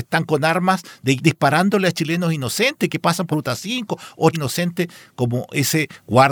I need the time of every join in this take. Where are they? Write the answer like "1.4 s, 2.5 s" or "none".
1.2 s, 3.3 s, 4.3 s

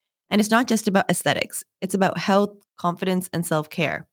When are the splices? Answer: none

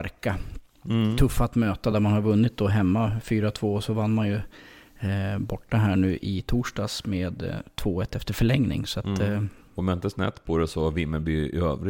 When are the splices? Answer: none

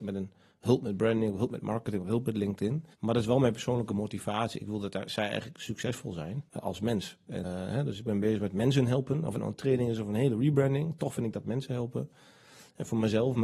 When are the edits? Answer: 2.9 s, 6.5 s, 7.4 s

